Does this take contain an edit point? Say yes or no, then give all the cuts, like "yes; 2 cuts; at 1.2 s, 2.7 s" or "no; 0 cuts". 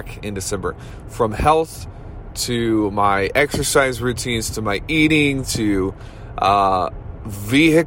no; 0 cuts